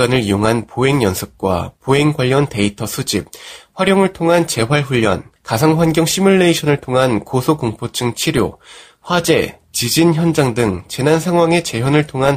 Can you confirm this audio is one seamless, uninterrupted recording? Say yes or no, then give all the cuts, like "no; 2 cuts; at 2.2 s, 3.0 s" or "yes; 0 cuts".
yes; 0 cuts